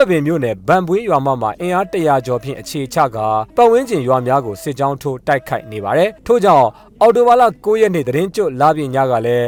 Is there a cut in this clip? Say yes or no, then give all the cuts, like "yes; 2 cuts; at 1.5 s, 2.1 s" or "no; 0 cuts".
yes; 2 cuts; at 3.5 s, 6.2 s